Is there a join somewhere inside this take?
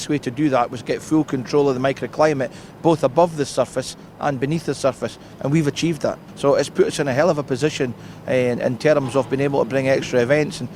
no; 0 cuts

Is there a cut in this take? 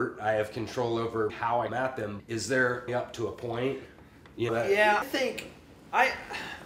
yes; 6 cuts; at 1.3 s, 1.7 s, 2.2 s, 2.9 s, 4.5 s, 5.0 s

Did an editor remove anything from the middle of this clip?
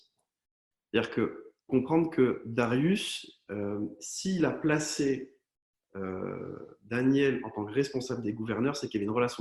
yes; 1 cut; at 1.7 s

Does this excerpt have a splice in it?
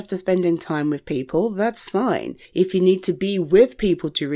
yes; 1 cut; at 2.4 s

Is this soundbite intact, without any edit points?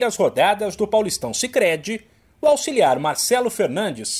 yes; 0 cuts

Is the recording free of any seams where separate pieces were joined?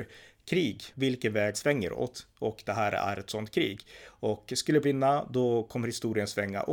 no; 3 cuts; at 0.9 s, 1.5 s, 4.8 s

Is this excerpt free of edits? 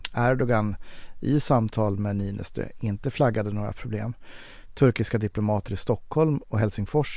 yes; 0 cuts

